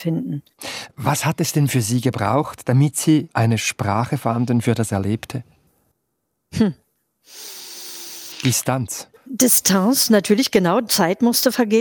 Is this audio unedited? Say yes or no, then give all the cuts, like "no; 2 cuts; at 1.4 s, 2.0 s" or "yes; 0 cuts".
no; 3 cuts; at 3.3 s, 5.9 s, 9.2 s